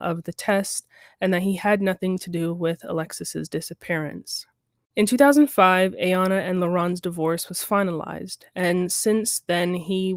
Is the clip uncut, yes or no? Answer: yes